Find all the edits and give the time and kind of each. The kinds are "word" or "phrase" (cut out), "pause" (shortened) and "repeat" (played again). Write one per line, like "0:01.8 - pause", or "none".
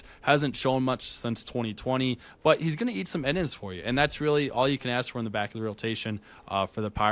none